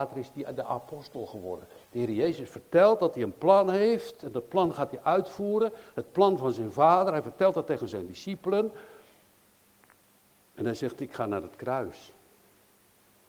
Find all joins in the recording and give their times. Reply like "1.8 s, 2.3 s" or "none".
1.8 s